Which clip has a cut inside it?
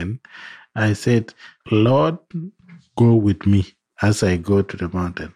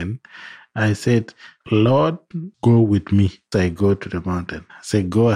second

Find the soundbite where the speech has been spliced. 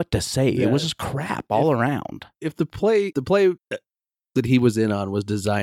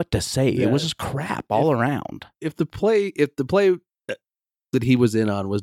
first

